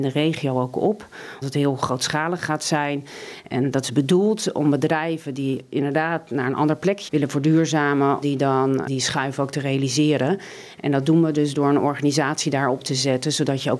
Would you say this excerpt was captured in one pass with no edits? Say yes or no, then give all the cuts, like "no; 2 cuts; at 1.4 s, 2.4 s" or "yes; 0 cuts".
no; 4 cuts; at 1.4 s, 7.1 s, 8.2 s, 8.9 s